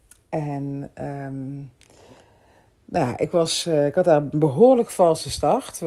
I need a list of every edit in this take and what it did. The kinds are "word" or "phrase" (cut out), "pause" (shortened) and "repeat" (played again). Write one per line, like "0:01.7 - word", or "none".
none